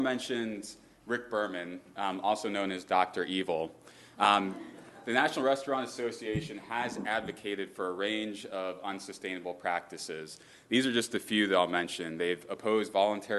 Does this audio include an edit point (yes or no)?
no